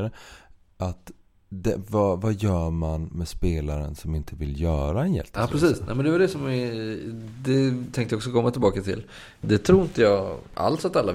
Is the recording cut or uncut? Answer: uncut